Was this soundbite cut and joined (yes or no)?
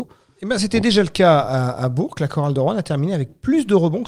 no